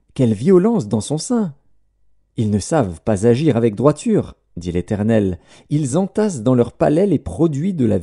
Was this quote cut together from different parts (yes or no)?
no